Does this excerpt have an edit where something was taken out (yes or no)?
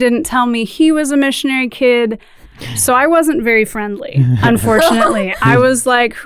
no